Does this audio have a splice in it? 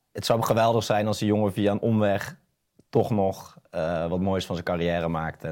no; 0 cuts

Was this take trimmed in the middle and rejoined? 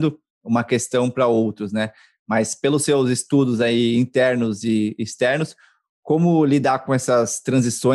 no; 0 cuts

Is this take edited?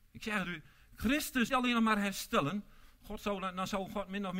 yes; 1 cut; at 1.5 s

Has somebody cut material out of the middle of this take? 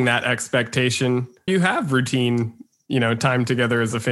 yes; 1 cut; at 1.5 s

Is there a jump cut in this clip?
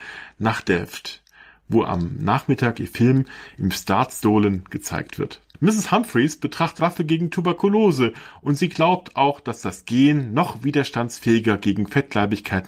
yes; 1 cut; at 6.8 s

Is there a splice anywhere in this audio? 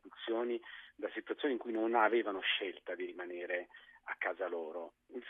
no; 0 cuts

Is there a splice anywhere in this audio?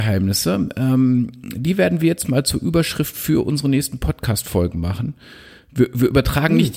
no; 0 cuts

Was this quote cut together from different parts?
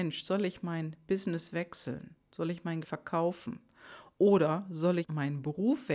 yes; 2 cuts; at 2.8 s, 5.0 s

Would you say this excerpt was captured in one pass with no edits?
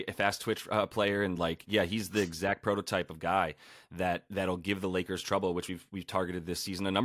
yes; 0 cuts

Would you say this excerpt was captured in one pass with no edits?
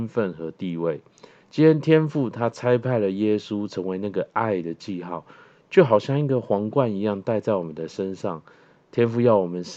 yes; 0 cuts

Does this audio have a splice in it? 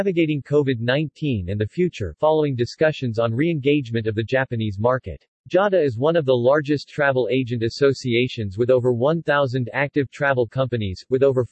yes; 1 cut; at 5.4 s

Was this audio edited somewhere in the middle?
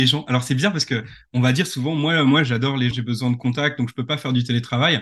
yes; 1 cut; at 2.9 s

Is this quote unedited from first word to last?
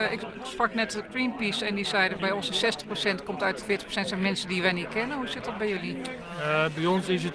no; 2 cuts; at 2.2 s, 3.6 s

